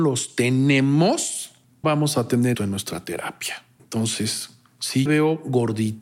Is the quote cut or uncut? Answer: cut